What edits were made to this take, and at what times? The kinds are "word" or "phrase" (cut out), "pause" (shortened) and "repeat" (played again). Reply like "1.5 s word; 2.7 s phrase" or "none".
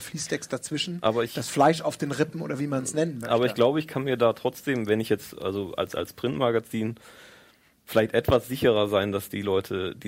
none